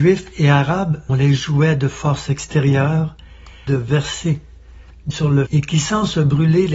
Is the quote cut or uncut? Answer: cut